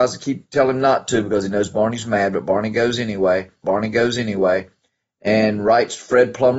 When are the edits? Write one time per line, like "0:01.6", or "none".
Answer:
0:03.6

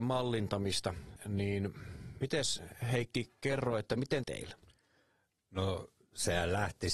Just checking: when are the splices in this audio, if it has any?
0:04.2

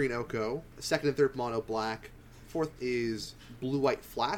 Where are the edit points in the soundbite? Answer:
0:01.3
0:02.8

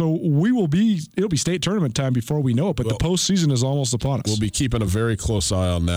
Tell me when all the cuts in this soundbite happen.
none

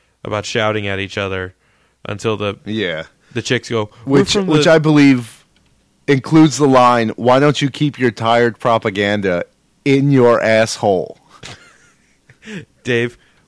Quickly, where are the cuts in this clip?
none

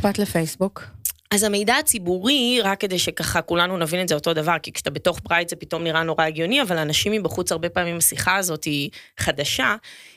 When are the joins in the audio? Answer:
none

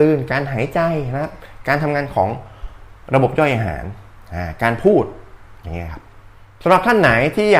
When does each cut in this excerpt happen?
none

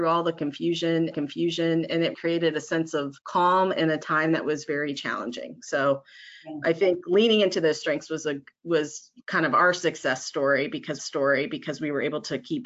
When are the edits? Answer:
0:01.1
0:02.1
0:03.2
0:09.2
0:11.0

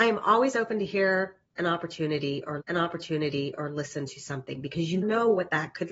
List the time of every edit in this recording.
0:02.6
0:05.0

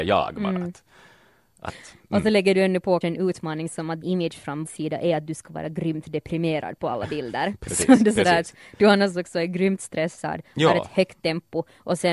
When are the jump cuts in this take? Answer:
0:03.0
0:04.0
0:04.6

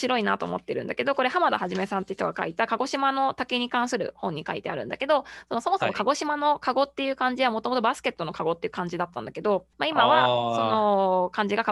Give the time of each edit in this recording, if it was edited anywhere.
0:09.7

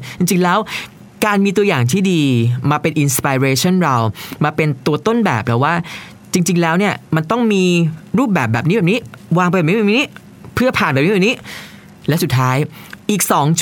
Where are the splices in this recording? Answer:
none

